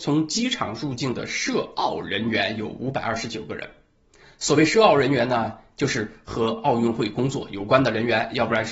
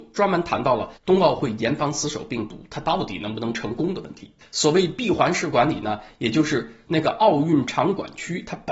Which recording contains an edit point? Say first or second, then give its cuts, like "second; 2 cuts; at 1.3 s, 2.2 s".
second; 2 cuts; at 1.0 s, 4.4 s